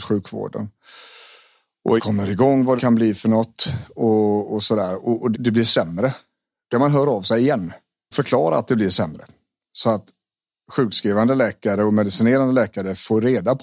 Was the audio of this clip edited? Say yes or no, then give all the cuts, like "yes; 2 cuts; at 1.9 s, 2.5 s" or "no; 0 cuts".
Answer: yes; 5 cuts; at 2.0 s, 2.8 s, 5.3 s, 6.7 s, 8.1 s